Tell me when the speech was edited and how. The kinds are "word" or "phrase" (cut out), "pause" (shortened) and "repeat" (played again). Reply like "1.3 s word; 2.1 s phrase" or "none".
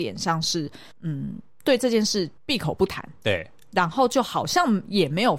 0.9 s pause; 2.4 s pause